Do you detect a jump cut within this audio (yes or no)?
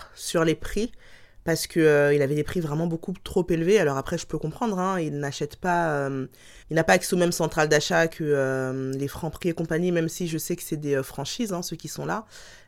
yes